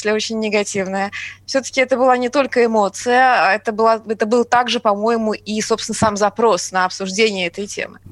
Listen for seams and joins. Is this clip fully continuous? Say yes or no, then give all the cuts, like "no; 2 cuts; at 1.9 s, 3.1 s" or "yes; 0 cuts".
yes; 0 cuts